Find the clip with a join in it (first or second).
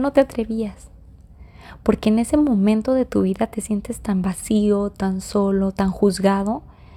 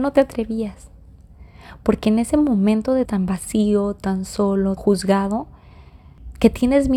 second